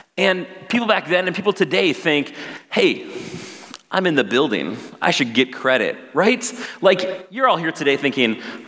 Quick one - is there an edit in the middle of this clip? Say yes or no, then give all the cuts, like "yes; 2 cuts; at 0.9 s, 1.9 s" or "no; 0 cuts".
no; 0 cuts